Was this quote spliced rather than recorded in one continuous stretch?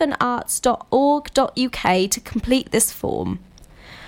no; 0 cuts

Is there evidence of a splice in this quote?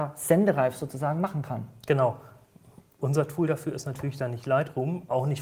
no; 0 cuts

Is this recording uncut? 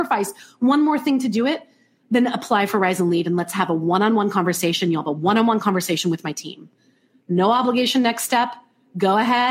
yes; 0 cuts

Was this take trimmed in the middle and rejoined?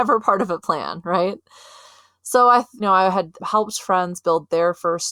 yes; 2 cuts; at 2.8 s, 3.4 s

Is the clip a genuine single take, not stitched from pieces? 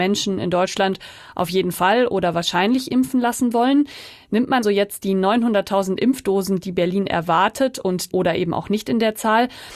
no; 2 cuts; at 4.6 s, 8.1 s

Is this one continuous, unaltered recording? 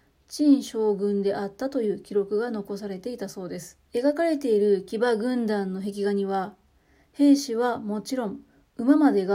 no; 1 cut; at 3.9 s

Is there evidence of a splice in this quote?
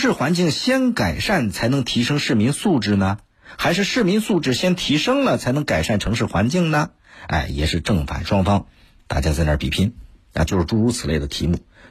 yes; 1 cut; at 10.5 s

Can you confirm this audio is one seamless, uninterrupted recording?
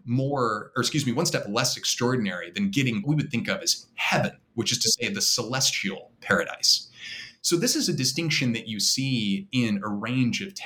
no; 1 cut; at 3.0 s

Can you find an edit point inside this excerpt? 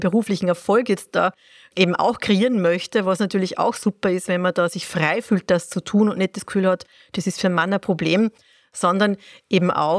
no; 0 cuts

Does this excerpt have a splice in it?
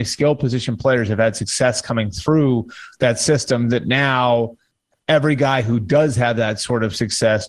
no; 0 cuts

